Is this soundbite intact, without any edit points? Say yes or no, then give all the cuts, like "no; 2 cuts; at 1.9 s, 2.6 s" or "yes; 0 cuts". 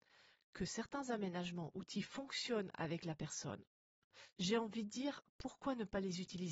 no; 1 cut; at 4.3 s